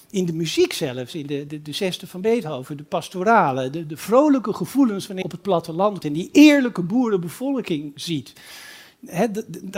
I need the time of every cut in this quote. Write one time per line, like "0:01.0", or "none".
0:01.5
0:05.2
0:06.0